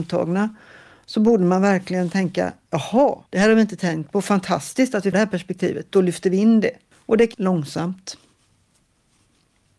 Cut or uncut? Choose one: cut